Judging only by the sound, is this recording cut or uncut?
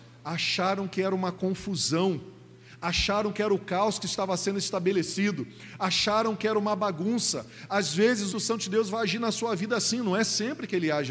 cut